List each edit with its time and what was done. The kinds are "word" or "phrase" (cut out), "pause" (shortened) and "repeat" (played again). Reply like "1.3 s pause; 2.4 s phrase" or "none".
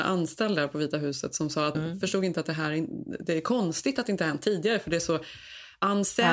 1.7 s word